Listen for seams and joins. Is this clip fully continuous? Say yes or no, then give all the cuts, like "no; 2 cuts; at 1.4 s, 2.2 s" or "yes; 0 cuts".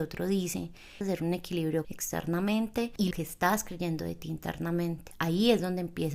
no; 3 cuts; at 1.0 s, 1.8 s, 3.1 s